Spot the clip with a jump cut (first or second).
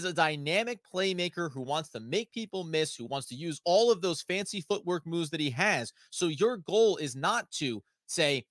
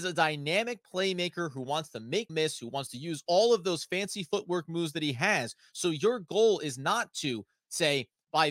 second